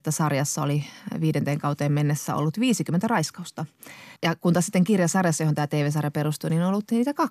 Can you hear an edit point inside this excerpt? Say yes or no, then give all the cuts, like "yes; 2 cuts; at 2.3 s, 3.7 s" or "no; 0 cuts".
no; 0 cuts